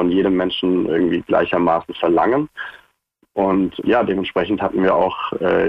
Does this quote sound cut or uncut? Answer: cut